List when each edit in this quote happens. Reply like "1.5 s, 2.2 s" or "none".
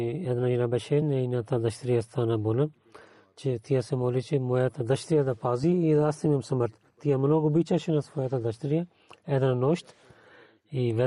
none